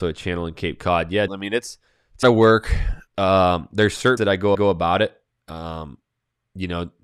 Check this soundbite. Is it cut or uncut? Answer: cut